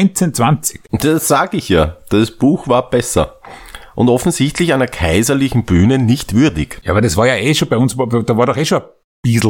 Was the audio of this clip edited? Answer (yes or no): no